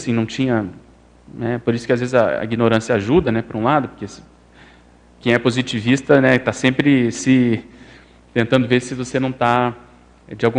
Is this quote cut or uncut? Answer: uncut